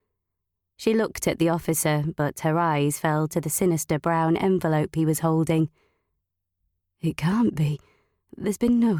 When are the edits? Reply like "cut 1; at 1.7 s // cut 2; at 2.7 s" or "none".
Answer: none